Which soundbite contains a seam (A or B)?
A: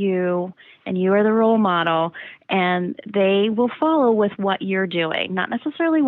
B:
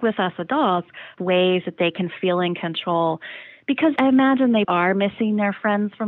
B